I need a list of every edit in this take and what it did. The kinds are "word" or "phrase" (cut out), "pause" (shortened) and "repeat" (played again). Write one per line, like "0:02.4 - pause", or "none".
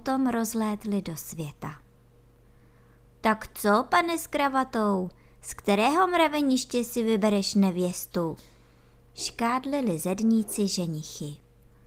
none